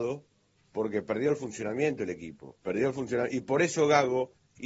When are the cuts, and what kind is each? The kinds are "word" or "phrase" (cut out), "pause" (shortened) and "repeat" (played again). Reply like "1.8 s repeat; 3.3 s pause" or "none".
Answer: 2.6 s pause